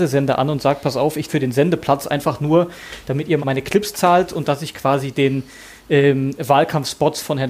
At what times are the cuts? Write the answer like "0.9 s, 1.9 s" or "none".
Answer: 1.3 s, 3.4 s